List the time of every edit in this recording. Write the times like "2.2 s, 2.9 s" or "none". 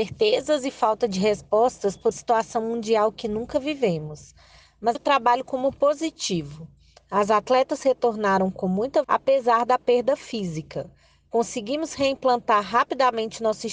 2.1 s, 4.9 s, 9.0 s